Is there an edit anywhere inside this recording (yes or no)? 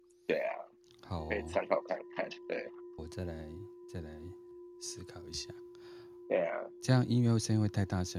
yes